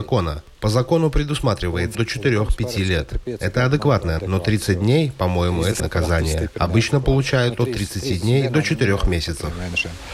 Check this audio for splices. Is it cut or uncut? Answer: cut